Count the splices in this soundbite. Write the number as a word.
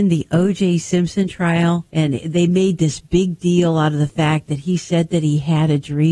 one